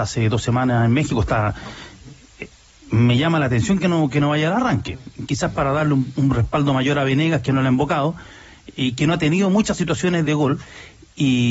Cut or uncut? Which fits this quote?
cut